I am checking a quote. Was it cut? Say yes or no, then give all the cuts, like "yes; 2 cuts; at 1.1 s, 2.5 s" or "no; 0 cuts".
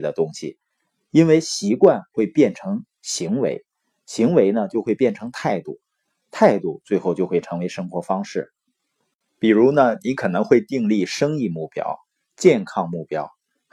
no; 0 cuts